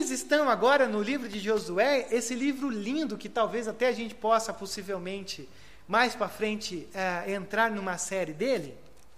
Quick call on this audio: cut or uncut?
uncut